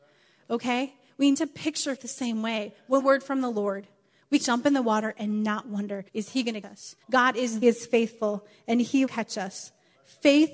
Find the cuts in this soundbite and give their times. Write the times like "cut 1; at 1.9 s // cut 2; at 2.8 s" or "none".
cut 1; at 1.3 s // cut 2; at 2.0 s // cut 3; at 3.0 s // cut 4; at 4.4 s // cut 5; at 6.1 s // cut 6; at 6.6 s // cut 7; at 7.0 s // cut 8; at 7.6 s // cut 9; at 9.1 s